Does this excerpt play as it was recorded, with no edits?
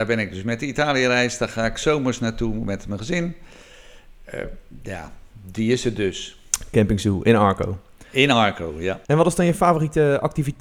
no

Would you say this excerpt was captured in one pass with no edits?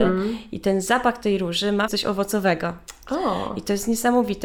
no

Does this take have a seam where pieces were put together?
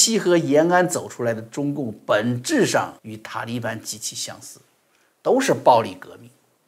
yes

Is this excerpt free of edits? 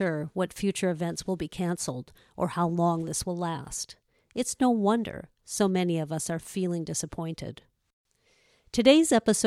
yes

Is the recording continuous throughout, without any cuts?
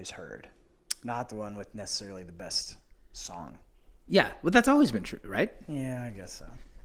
yes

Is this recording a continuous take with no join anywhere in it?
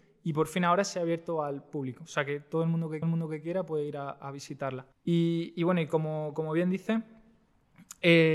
no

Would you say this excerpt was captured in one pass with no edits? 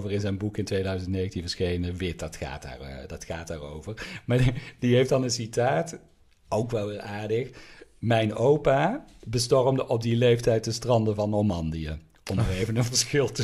yes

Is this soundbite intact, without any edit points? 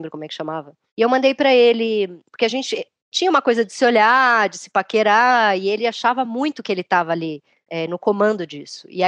yes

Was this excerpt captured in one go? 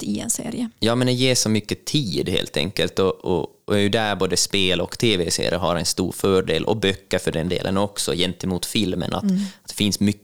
yes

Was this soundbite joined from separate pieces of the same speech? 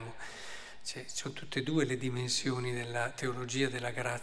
no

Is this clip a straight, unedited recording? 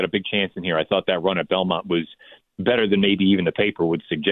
yes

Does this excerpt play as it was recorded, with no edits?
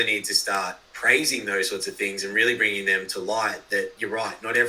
yes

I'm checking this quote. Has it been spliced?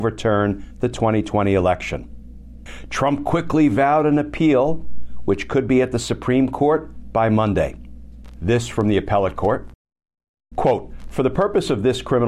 no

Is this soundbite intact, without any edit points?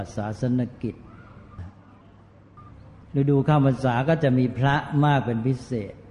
yes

